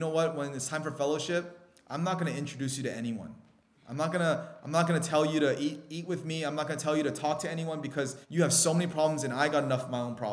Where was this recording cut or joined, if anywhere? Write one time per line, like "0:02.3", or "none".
0:08.2